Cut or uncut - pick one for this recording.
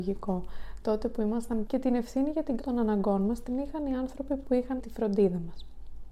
cut